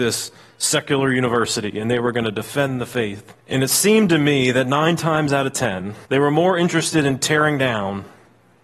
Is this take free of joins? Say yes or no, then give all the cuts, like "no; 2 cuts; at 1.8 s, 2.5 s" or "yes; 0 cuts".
no; 2 cuts; at 3.4 s, 6.1 s